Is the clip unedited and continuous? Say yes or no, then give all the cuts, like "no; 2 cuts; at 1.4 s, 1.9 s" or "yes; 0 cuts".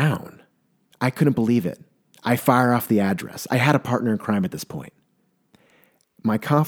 yes; 0 cuts